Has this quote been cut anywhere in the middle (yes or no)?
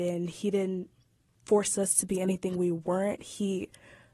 no